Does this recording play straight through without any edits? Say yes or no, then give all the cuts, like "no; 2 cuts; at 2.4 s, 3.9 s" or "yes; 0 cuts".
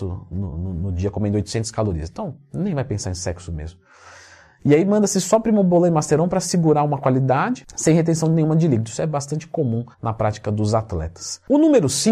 no; 1 cut; at 9.9 s